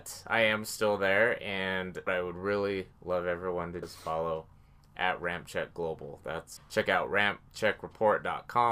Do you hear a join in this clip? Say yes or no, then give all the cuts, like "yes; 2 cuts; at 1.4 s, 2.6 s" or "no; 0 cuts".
yes; 3 cuts; at 2.1 s, 3.8 s, 6.6 s